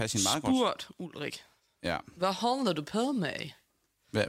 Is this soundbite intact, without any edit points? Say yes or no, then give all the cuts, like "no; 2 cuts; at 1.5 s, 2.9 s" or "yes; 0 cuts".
yes; 0 cuts